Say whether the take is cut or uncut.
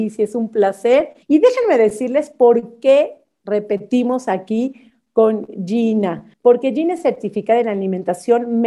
cut